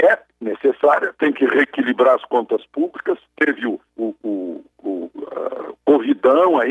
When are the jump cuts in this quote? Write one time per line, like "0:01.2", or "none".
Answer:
0:03.9
0:04.7